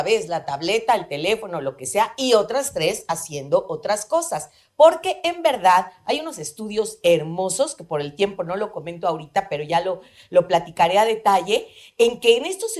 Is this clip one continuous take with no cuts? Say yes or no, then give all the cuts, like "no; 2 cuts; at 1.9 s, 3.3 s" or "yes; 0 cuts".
yes; 0 cuts